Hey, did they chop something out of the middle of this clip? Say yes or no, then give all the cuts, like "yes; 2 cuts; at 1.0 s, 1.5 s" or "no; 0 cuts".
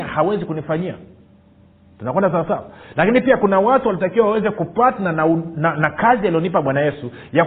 no; 0 cuts